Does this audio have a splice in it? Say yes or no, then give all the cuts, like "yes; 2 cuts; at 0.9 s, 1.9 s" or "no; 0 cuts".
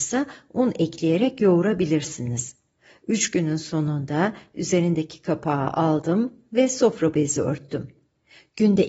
no; 0 cuts